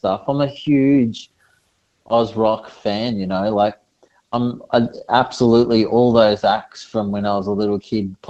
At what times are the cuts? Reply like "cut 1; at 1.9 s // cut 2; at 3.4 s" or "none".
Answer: none

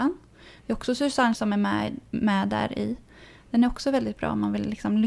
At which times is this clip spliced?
cut 1; at 1.3 s

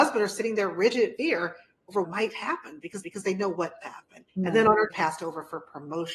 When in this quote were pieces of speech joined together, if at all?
cut 1; at 1.2 s // cut 2; at 2.0 s // cut 3; at 3.0 s // cut 4; at 3.8 s // cut 5; at 4.3 s // cut 6; at 4.9 s

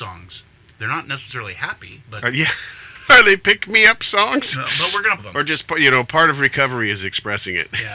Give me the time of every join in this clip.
cut 1; at 5.2 s

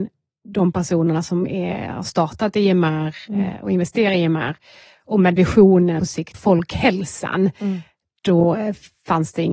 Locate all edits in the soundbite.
cut 1; at 5.4 s // cut 2; at 6.0 s // cut 3; at 6.3 s

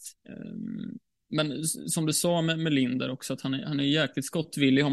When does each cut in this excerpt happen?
none

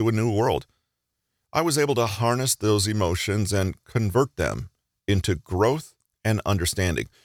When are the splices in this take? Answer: none

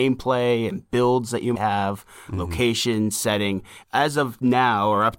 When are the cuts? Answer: cut 1; at 1.6 s // cut 2; at 3.8 s

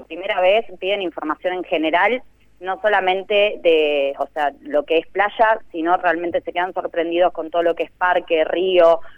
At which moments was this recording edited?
none

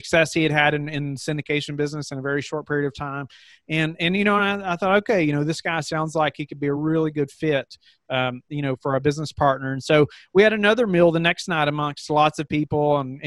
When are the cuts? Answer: none

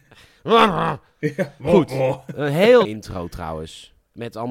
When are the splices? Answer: cut 1; at 2.8 s

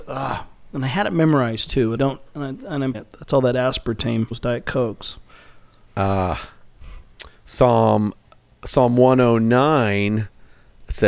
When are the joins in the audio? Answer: cut 1; at 2.0 s // cut 2; at 2.9 s // cut 3; at 4.3 s

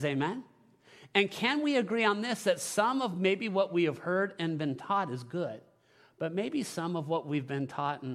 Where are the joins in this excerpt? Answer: none

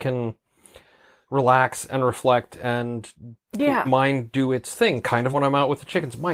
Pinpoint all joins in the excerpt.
cut 1; at 3.5 s // cut 2; at 3.8 s // cut 3; at 5.3 s

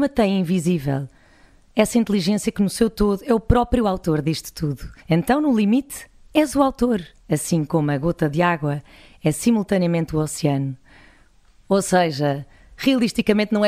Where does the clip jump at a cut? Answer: cut 1; at 5.0 s // cut 2; at 7.2 s

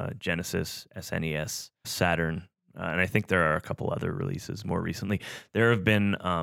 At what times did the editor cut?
cut 1; at 1.8 s

